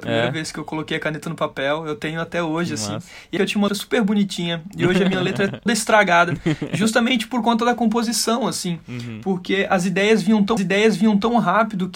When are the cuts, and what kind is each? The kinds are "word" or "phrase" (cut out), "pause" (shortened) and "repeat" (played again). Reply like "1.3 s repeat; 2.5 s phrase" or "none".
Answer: 3.4 s phrase; 3.7 s word; 5.7 s word; 10.6 s repeat